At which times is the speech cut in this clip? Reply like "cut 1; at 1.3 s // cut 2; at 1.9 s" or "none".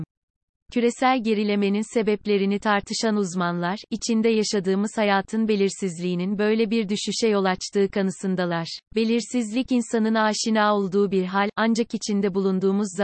cut 1; at 8.9 s